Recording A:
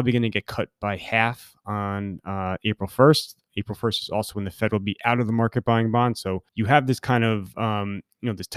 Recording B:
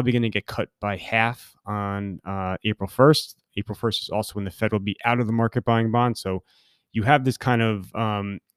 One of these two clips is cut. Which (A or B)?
A